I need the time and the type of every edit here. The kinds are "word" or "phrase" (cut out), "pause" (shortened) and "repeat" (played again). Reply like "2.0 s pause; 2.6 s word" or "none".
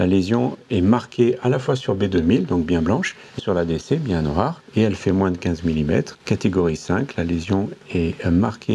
3.4 s phrase; 4.7 s pause; 6.2 s pause